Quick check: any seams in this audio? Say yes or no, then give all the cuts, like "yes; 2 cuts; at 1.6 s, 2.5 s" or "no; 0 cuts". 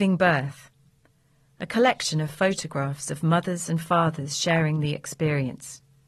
no; 0 cuts